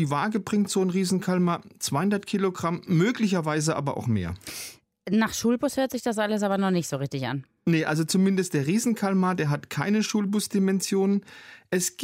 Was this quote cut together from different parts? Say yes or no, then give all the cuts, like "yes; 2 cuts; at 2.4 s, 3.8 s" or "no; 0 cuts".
no; 0 cuts